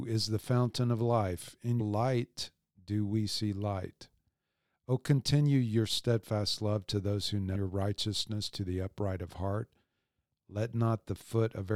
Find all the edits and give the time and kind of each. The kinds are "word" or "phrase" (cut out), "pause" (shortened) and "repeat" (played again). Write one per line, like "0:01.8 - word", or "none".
0:01.8 - word
0:07.5 - phrase